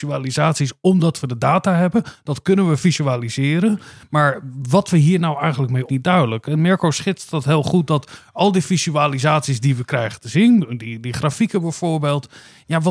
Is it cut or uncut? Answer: cut